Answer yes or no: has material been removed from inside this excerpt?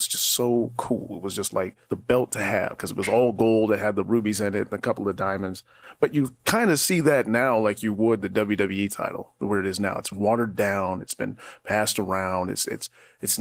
yes